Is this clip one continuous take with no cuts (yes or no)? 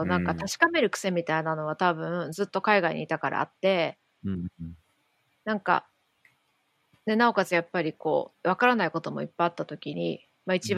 yes